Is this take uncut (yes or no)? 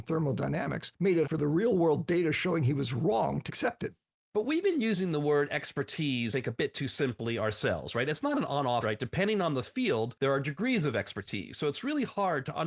no